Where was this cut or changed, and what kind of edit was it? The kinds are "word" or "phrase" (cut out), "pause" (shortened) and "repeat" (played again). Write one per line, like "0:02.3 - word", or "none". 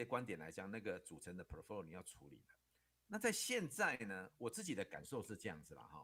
none